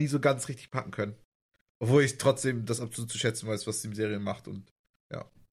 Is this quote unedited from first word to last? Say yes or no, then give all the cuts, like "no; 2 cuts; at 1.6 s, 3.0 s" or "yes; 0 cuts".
yes; 0 cuts